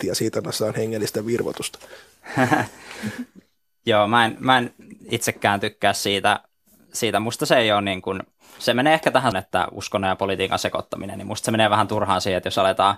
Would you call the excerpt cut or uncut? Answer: cut